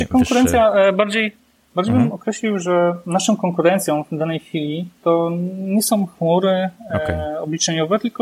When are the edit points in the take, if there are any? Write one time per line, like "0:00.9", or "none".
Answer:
none